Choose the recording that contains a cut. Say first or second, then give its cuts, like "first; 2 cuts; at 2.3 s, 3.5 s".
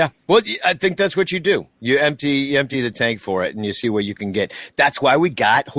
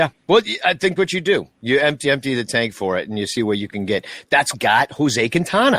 second; 3 cuts; at 1.0 s, 2.0 s, 4.5 s